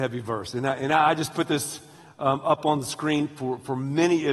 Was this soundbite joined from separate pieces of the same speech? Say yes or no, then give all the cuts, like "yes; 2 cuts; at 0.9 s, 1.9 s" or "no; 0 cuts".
no; 0 cuts